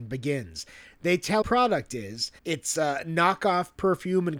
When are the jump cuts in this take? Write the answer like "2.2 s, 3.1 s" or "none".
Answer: 1.4 s, 2.4 s